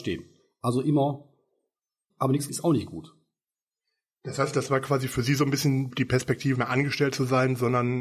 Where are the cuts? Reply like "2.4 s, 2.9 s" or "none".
2.1 s, 2.5 s, 5.9 s, 6.5 s